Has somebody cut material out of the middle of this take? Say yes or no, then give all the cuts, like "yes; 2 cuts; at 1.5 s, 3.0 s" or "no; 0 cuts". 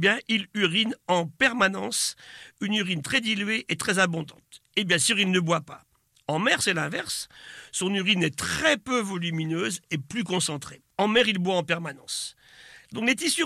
yes; 1 cut; at 10.9 s